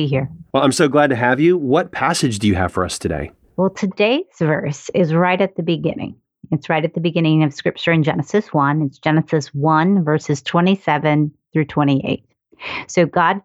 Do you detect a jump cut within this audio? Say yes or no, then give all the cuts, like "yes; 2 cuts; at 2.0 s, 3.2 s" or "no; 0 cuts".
no; 0 cuts